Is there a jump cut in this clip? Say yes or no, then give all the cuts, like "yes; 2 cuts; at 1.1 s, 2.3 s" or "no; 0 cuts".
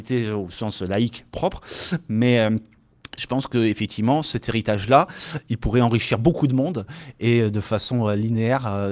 no; 0 cuts